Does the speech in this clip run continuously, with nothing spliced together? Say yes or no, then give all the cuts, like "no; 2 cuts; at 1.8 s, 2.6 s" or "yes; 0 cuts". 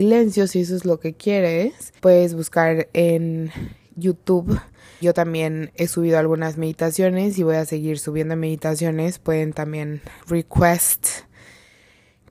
no; 3 cuts; at 2.0 s, 5.0 s, 10.2 s